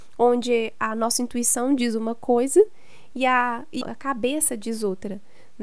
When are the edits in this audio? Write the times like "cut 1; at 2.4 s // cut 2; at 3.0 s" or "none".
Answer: cut 1; at 3.8 s

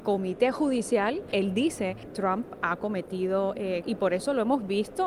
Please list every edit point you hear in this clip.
cut 1; at 3.8 s

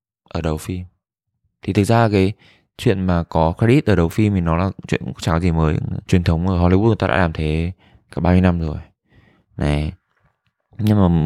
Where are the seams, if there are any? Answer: none

